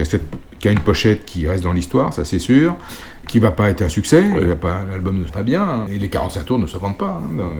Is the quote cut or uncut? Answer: cut